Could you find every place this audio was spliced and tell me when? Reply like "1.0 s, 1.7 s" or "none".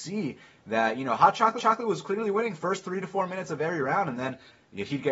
1.6 s